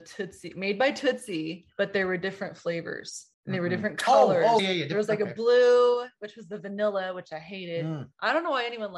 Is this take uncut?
no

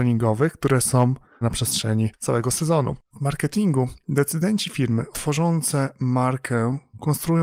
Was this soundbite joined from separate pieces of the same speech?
yes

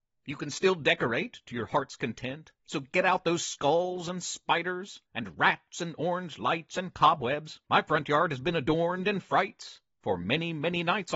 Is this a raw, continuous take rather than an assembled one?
no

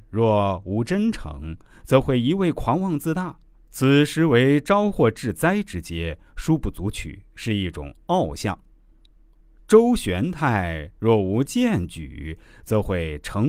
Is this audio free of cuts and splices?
yes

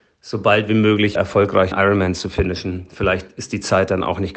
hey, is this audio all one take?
no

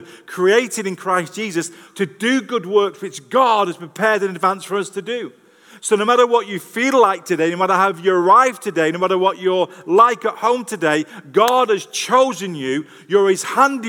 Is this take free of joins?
yes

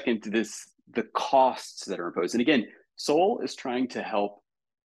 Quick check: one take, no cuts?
yes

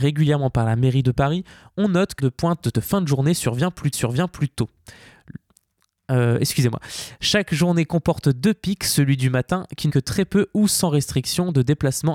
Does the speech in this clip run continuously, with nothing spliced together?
no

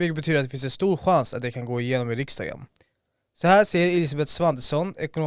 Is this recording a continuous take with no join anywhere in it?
yes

